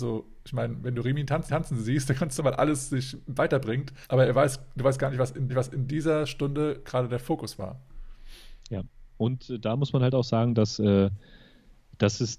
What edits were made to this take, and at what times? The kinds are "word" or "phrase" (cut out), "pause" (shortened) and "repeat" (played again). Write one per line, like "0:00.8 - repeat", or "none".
0:01.5 - repeat
0:02.4 - phrase
0:04.0 - pause
0:05.5 - repeat